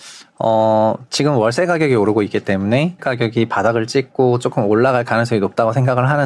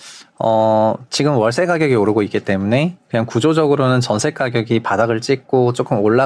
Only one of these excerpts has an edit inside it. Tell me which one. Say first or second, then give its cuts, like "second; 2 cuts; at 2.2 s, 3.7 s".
first; 1 cut; at 3.0 s